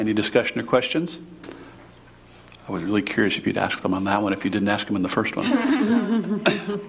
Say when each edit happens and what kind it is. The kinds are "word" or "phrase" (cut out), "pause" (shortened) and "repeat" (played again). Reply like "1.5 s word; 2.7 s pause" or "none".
none